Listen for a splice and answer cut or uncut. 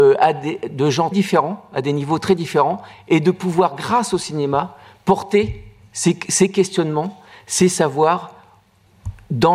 cut